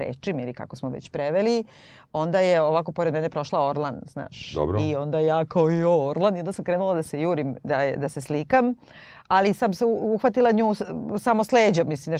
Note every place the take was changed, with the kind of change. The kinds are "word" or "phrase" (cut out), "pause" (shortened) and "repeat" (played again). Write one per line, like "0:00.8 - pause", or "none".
none